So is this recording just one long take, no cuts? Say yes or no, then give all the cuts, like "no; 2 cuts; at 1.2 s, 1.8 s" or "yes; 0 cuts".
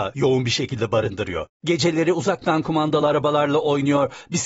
yes; 0 cuts